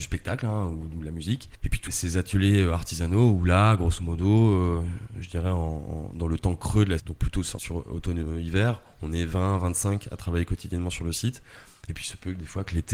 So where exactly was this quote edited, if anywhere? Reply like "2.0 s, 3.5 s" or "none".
1.9 s, 7.0 s, 7.6 s